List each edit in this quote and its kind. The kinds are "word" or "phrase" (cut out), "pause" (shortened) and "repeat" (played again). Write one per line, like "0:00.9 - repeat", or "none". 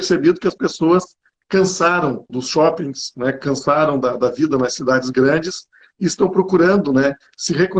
0:02.3 - word